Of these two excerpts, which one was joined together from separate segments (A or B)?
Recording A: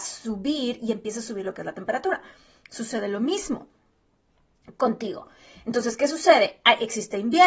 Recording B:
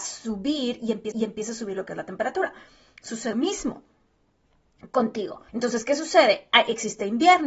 B